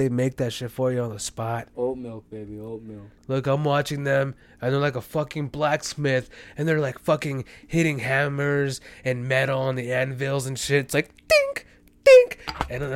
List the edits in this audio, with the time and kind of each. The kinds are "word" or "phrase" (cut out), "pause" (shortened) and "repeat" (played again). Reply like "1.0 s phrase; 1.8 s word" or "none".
none